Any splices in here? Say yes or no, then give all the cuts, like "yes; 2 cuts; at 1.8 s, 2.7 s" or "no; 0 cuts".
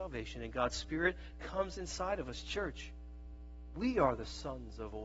no; 0 cuts